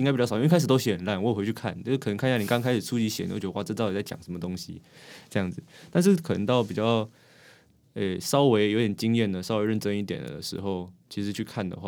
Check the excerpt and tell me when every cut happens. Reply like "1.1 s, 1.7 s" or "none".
none